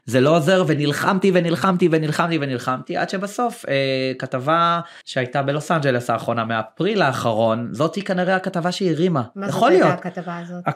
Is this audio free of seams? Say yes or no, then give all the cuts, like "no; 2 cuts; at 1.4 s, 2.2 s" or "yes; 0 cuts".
no; 1 cut; at 5.0 s